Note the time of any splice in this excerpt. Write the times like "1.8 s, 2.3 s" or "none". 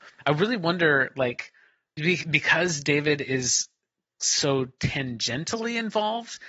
none